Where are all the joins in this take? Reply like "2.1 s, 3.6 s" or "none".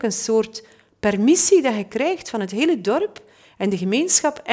none